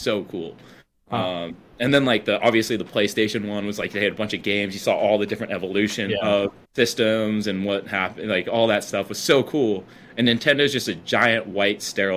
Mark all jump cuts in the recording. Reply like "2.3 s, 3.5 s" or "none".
6.6 s